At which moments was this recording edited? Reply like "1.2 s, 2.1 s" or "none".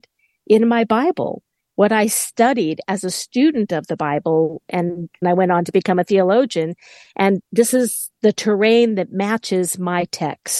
5.2 s, 8.2 s